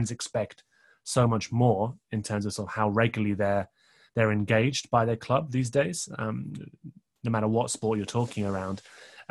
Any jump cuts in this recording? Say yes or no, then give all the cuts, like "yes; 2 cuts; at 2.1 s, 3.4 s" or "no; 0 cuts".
no; 0 cuts